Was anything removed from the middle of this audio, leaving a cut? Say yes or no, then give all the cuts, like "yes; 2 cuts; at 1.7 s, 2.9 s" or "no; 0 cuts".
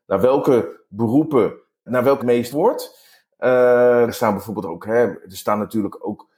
yes; 4 cuts; at 1.9 s, 2.2 s, 2.5 s, 4.1 s